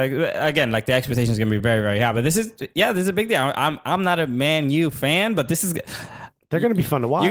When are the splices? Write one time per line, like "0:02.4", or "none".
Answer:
none